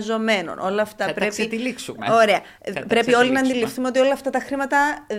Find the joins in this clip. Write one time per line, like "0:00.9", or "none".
none